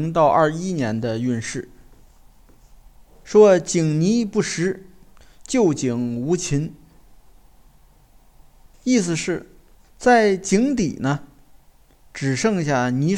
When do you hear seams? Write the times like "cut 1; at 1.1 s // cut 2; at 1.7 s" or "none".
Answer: none